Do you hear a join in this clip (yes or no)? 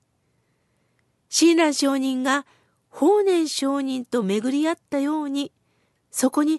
no